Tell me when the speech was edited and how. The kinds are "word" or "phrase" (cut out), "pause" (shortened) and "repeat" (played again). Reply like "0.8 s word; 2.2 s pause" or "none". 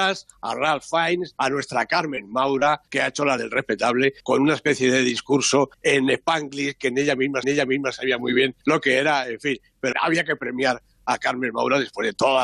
1.3 s word; 2.9 s pause; 3.4 s word; 4.2 s pause; 5.7 s pause; 7.4 s repeat; 8.6 s pause; 9.9 s word